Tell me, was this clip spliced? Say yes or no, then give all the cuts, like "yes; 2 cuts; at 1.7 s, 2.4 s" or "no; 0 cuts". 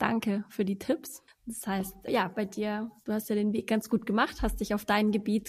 yes; 2 cuts; at 1.3 s, 2.1 s